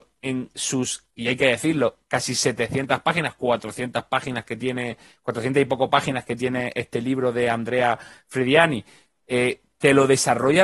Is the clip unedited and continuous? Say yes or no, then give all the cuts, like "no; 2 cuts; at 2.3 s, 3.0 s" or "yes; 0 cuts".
yes; 0 cuts